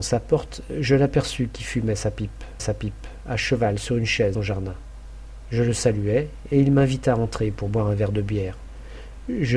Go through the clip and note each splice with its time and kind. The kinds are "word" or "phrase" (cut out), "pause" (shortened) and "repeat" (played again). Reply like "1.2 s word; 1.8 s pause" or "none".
2.6 s repeat; 4.3 s phrase